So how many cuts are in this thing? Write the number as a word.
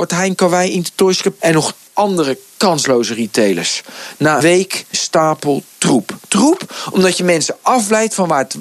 five